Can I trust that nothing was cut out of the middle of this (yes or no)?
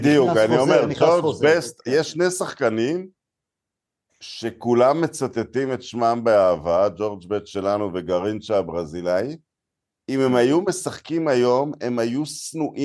yes